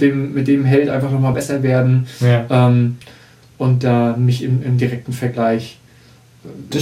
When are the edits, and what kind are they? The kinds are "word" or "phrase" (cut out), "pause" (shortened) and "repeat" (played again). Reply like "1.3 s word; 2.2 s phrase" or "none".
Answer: none